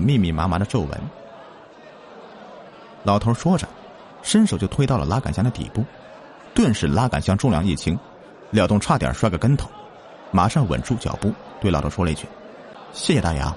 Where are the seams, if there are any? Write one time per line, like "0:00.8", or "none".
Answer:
none